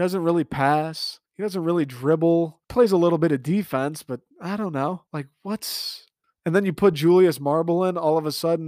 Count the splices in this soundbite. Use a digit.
5